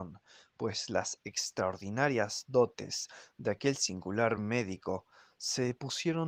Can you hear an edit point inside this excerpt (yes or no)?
no